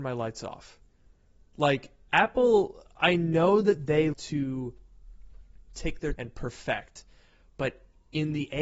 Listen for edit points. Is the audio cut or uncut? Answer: cut